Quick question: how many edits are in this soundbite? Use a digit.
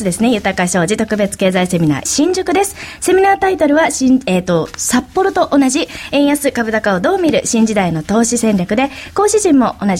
1